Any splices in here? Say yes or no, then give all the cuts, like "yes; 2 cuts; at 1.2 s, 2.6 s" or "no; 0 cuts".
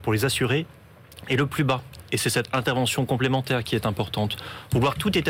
no; 0 cuts